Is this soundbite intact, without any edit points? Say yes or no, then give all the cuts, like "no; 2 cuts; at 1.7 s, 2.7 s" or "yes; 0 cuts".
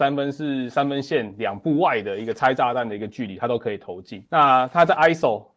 yes; 0 cuts